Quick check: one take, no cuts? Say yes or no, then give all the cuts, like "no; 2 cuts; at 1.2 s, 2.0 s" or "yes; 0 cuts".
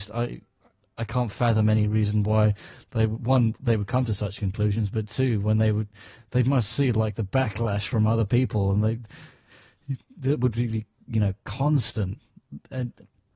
yes; 0 cuts